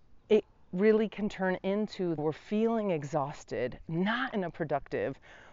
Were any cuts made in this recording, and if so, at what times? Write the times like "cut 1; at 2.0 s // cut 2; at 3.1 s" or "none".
cut 1; at 2.2 s